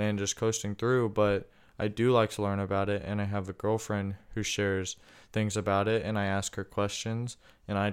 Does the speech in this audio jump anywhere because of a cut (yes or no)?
no